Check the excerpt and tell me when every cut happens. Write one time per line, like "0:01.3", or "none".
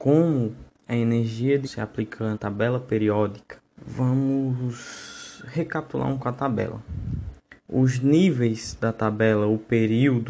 0:01.6
0:02.3
0:03.7
0:06.2
0:07.6